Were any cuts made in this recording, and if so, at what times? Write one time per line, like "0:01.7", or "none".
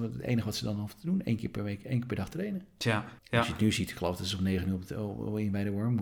0:03.2